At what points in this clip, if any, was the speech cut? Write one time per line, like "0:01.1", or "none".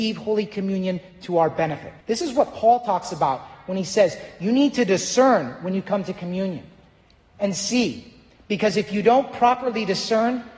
0:02.0

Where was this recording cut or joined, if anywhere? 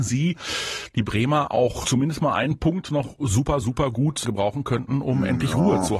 0:01.8
0:03.6
0:04.2

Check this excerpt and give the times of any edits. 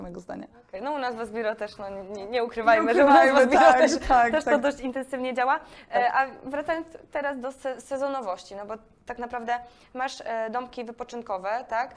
none

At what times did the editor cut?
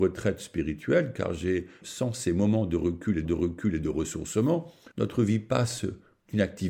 0:01.8
0:03.2
0:04.9

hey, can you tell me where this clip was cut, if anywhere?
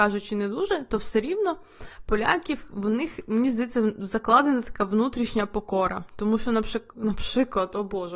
0:06.9

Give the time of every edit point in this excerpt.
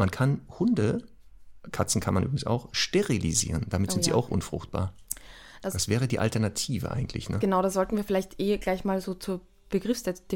none

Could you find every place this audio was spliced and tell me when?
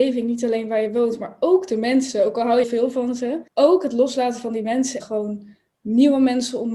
0:02.6
0:03.5
0:05.0

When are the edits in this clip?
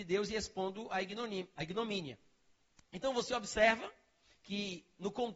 none

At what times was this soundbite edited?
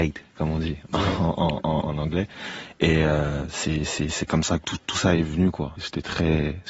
0:05.8

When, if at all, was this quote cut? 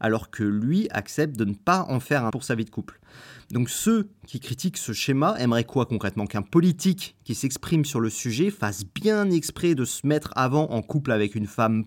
0:02.3

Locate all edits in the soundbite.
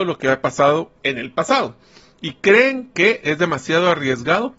none

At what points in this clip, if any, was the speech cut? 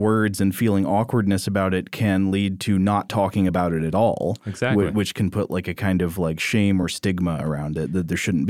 none

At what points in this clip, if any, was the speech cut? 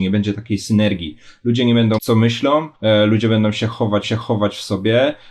0:02.0
0:02.7
0:04.0

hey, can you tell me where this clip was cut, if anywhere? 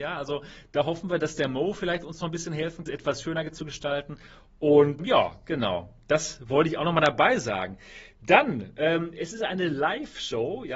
0:02.9
0:05.0

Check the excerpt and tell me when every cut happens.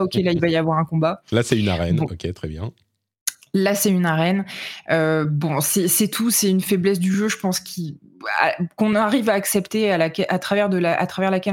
none

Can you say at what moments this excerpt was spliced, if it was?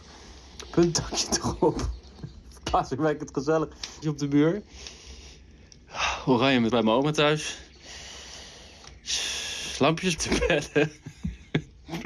0:04.0
0:06.7
0:10.2

